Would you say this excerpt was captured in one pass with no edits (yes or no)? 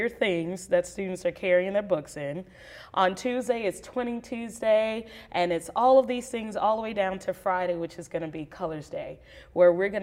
yes